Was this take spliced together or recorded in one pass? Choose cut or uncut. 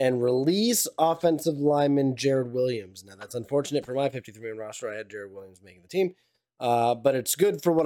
uncut